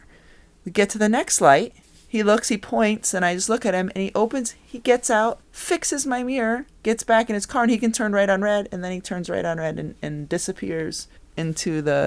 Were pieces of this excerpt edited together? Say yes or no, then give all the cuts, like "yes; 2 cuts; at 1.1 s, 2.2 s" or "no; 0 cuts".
yes; 4 cuts; at 1.8 s, 5.4 s, 6.8 s, 11.2 s